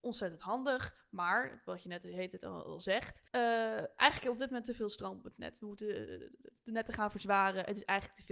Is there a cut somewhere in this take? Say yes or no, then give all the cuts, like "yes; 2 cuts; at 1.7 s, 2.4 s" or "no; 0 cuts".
yes; 1 cut; at 3.3 s